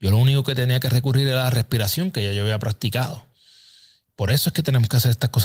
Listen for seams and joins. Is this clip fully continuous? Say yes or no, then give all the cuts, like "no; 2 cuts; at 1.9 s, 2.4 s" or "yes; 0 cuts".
yes; 0 cuts